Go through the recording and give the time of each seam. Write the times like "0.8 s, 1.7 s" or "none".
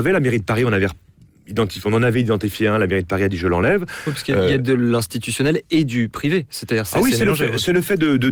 none